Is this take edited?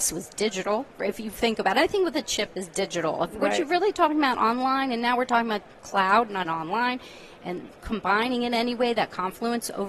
yes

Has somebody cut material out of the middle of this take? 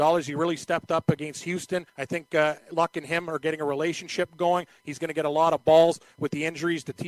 yes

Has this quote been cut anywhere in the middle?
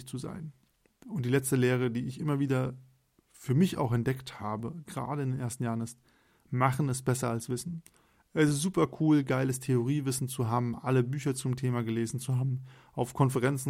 no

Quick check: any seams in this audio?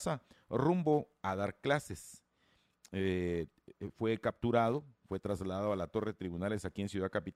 no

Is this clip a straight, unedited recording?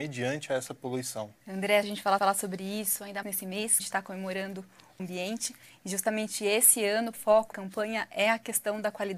no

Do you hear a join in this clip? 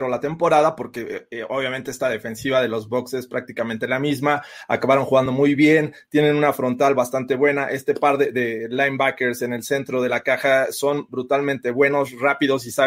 no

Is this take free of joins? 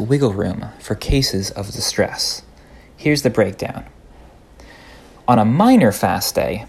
yes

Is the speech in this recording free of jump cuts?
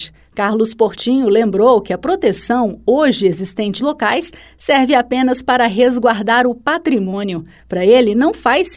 no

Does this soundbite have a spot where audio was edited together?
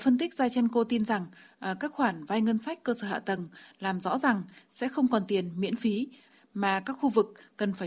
no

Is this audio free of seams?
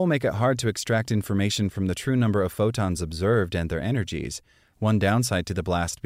yes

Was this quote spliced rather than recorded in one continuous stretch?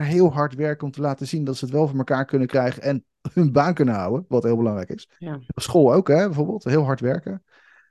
yes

